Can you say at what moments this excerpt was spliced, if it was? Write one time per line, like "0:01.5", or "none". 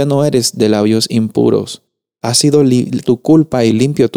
0:02.2
0:03.0